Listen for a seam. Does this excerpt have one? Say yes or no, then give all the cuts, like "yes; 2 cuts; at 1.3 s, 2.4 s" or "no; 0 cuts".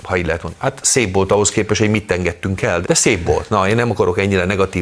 yes; 1 cut; at 2.8 s